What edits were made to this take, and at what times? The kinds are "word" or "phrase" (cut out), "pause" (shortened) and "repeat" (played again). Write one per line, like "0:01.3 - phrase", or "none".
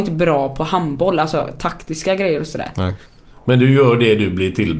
none